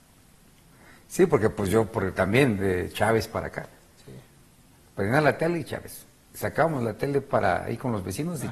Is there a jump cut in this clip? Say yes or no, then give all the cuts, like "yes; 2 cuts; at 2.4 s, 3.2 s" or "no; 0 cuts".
no; 0 cuts